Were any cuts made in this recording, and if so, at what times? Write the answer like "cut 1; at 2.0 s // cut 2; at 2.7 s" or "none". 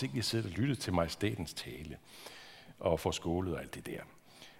none